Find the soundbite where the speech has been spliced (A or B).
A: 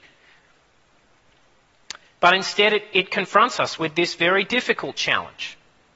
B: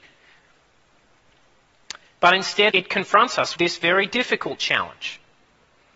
B